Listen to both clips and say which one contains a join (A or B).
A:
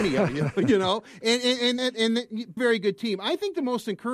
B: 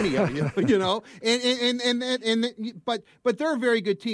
A